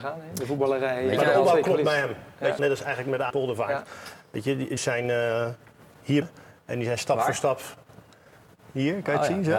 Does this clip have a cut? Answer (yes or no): yes